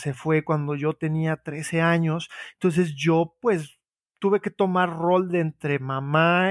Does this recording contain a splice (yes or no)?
no